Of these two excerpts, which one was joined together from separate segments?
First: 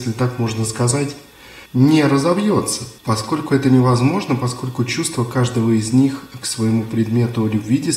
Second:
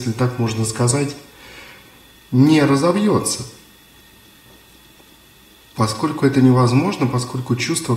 first; 2 cuts; at 1.7 s, 3.0 s

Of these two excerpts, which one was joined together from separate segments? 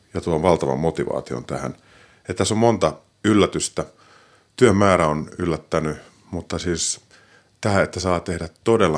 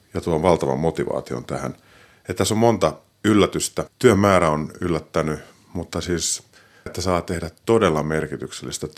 second; 2 cuts; at 3.9 s, 6.9 s

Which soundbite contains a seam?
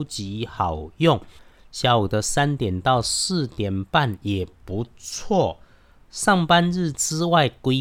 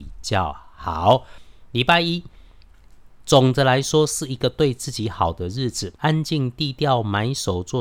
second; 1 cut; at 6.0 s

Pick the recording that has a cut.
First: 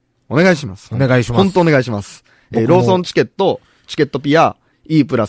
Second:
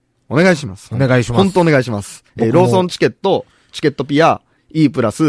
second; 1 cut; at 2.3 s

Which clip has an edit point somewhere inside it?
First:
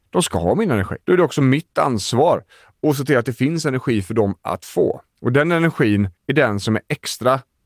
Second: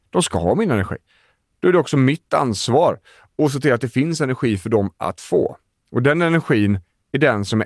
first; 3 cuts; at 1.0 s, 5.1 s, 6.2 s

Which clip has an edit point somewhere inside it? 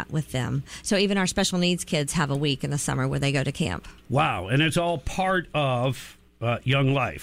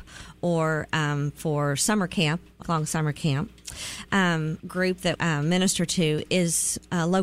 second; 3 cuts; at 2.6 s, 4.6 s, 5.2 s

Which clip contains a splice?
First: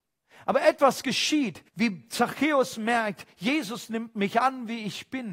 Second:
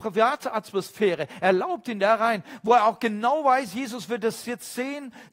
first; 1 cut; at 1.7 s

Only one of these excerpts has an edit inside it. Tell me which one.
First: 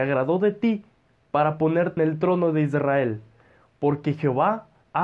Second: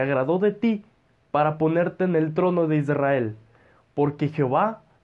first; 1 cut; at 2.0 s

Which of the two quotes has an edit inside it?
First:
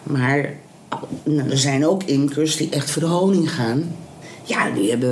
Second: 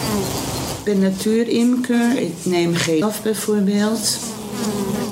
second; 1 cut; at 3.0 s

